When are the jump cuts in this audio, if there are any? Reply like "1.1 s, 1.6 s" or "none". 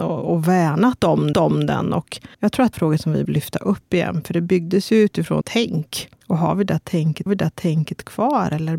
1.3 s, 2.3 s, 2.7 s, 3.2 s, 5.4 s, 6.2 s, 7.3 s